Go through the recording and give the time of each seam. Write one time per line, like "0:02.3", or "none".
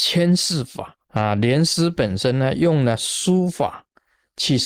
0:01.1